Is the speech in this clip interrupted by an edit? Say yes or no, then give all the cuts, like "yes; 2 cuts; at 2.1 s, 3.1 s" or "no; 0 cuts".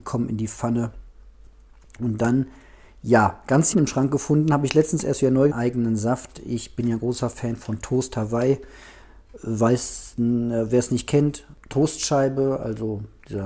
yes; 2 cuts; at 3.7 s, 5.5 s